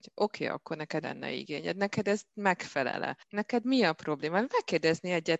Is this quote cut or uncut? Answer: cut